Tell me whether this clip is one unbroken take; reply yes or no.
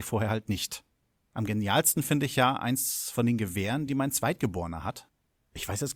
yes